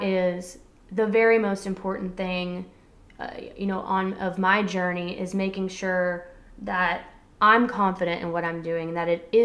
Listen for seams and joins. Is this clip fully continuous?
yes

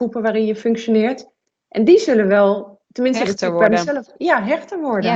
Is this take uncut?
yes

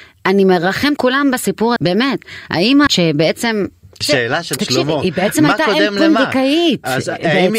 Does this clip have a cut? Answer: yes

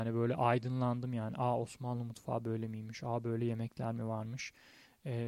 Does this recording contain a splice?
no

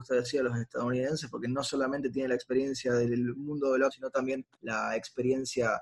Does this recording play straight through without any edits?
no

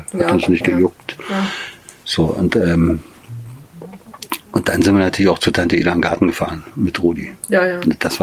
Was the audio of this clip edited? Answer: no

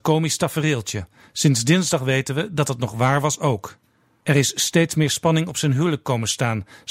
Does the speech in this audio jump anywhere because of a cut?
no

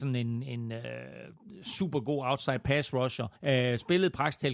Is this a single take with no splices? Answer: no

